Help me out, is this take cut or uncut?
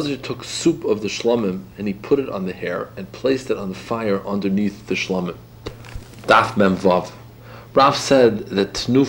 uncut